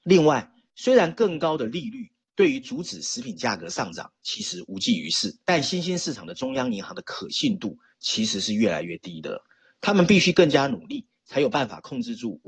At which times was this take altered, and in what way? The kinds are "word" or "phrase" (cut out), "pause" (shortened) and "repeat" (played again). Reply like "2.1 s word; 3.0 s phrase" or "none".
5.4 s pause